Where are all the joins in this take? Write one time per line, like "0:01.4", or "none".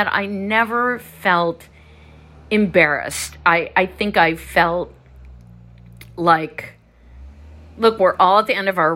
none